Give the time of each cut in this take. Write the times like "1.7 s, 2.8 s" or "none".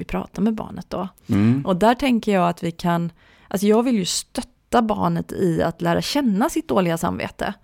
none